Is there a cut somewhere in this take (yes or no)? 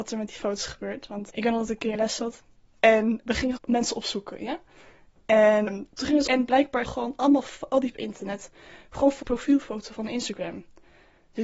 yes